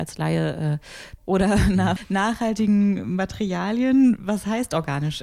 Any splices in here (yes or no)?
yes